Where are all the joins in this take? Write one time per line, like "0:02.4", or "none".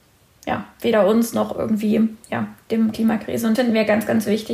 0:02.2
0:02.9
0:03.5